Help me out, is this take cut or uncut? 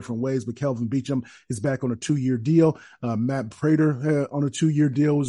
uncut